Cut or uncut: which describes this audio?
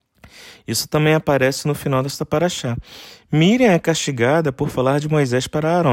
uncut